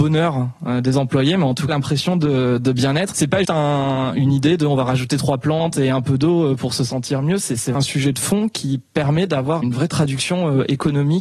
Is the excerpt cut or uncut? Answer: cut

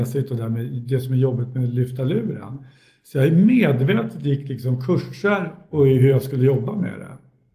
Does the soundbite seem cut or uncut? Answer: uncut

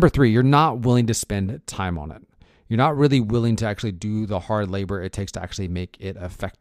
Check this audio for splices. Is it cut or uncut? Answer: uncut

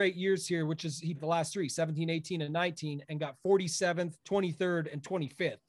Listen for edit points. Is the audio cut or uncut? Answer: cut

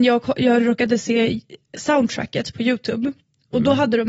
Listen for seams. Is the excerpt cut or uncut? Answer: uncut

